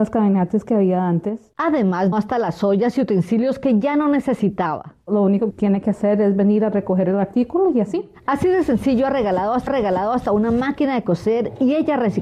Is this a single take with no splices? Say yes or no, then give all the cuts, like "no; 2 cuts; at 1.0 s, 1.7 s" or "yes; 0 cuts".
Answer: no; 3 cuts; at 2.1 s, 5.5 s, 9.7 s